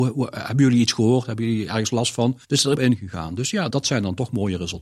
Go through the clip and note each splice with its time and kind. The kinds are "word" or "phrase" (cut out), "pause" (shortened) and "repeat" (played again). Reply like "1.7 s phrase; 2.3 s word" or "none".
2.4 s pause; 2.7 s phrase; 3.7 s word